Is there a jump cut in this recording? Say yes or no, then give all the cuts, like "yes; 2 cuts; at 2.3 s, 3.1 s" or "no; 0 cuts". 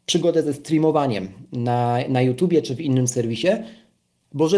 no; 0 cuts